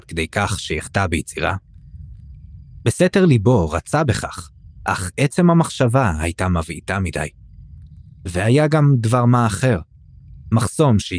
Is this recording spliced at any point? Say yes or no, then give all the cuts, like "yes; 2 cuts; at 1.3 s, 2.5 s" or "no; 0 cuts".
no; 0 cuts